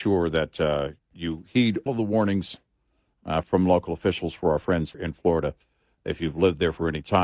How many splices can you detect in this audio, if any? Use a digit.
4